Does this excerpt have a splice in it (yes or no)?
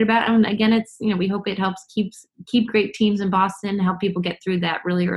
no